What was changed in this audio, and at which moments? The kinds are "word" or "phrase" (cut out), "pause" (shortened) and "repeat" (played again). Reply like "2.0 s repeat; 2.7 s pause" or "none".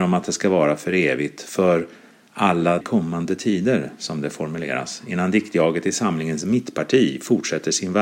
2.8 s word